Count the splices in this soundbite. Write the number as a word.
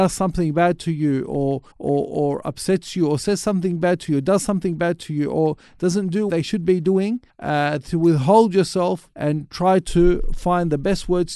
four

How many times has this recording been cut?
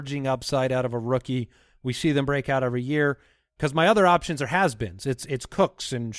zero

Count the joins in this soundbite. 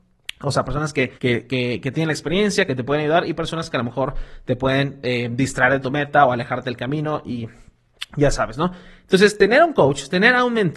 one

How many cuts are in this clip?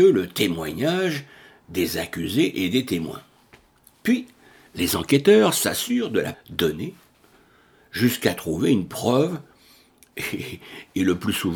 one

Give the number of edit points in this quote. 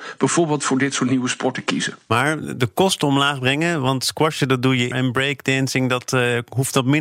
one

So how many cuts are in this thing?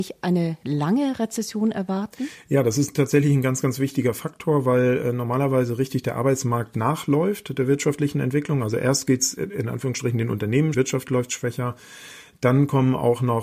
one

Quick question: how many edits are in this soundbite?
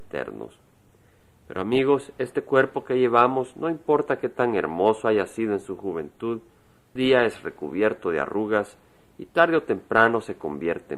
one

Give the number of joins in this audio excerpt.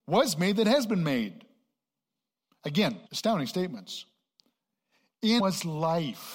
two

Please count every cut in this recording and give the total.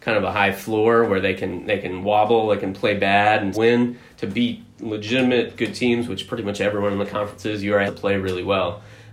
two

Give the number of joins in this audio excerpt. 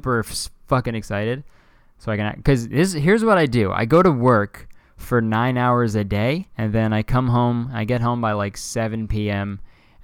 one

